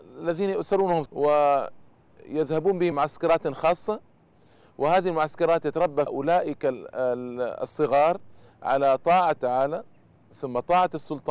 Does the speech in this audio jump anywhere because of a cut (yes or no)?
yes